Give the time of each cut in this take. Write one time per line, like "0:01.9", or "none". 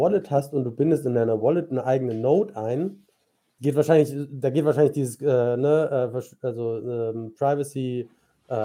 0:03.6